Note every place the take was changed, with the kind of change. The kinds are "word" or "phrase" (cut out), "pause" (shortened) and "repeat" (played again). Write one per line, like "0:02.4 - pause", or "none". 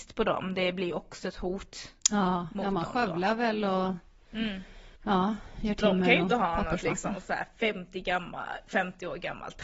0:02.0 - pause
0:05.0 - pause